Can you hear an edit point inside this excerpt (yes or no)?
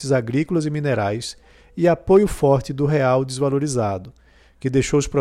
no